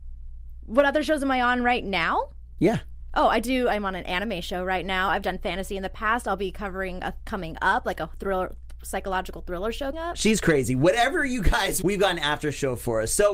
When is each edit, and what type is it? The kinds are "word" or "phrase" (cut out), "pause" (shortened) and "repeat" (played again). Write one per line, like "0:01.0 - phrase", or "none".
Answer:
0:07.2 - word
0:09.9 - word
0:11.8 - word